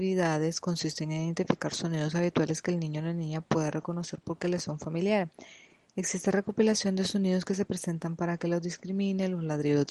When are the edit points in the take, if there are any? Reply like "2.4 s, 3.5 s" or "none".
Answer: none